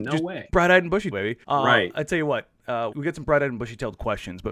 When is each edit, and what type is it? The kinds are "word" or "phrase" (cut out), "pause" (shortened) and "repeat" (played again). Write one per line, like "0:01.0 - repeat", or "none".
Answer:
0:01.1 - word
0:01.4 - pause
0:02.9 - word